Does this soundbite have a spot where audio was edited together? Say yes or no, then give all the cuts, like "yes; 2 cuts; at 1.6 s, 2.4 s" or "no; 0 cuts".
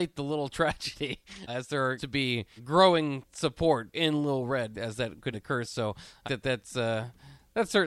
yes; 7 cuts; at 1.5 s, 2.0 s, 2.6 s, 3.9 s, 4.7 s, 5.3 s, 6.2 s